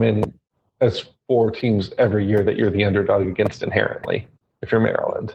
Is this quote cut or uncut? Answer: uncut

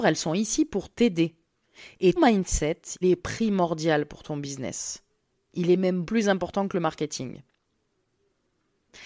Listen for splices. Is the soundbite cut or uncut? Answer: cut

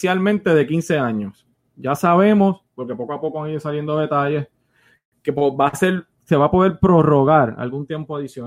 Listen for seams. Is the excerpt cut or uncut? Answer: uncut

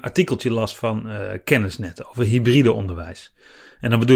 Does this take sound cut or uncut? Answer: uncut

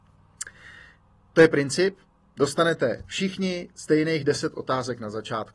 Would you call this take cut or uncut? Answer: uncut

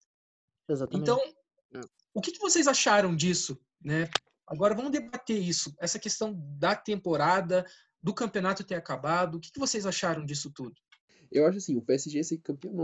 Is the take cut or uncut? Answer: uncut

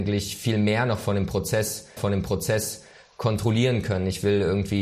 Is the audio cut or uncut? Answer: cut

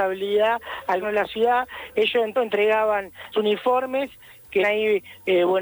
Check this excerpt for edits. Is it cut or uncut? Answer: cut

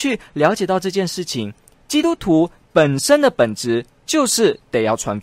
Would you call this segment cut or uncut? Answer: uncut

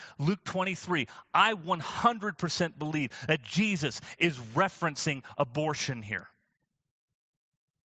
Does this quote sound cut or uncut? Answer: uncut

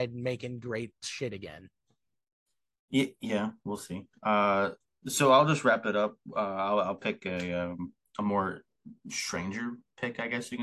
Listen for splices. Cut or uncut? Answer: cut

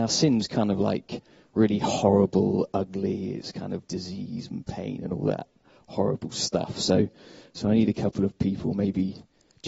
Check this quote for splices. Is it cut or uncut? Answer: uncut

